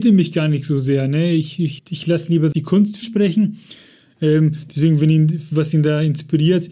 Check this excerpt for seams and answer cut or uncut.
cut